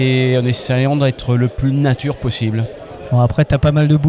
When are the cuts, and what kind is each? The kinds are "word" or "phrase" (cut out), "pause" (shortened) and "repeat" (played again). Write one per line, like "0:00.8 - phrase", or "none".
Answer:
none